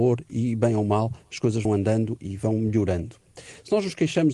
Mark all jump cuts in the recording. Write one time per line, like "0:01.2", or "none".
0:01.6